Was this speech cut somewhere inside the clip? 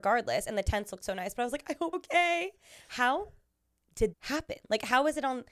yes; 2 cuts; at 1.9 s, 4.1 s

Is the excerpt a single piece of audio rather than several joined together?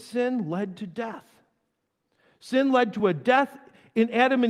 yes; 0 cuts

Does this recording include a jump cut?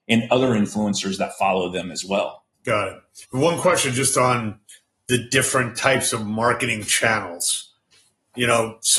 yes; 2 cuts; at 2.5 s, 3.2 s

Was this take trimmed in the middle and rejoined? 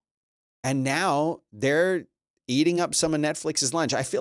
no; 0 cuts

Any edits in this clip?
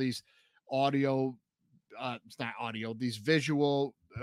no; 0 cuts

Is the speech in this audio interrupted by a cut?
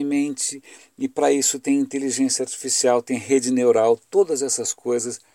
no; 0 cuts

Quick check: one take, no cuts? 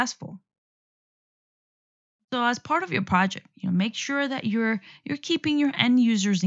yes; 0 cuts

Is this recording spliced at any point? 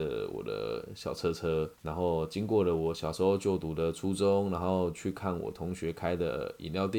yes; 1 cut; at 1.7 s

